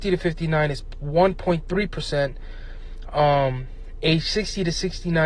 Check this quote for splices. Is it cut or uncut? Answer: uncut